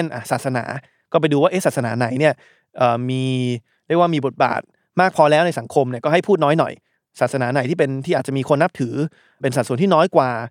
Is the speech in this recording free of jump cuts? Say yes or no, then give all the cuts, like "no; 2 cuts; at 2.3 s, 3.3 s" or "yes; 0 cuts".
yes; 0 cuts